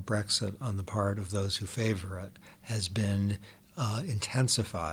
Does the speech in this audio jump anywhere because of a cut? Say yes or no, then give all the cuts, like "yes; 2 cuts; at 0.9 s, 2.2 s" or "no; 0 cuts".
no; 0 cuts